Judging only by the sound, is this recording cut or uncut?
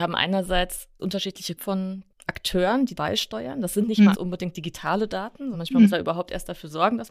cut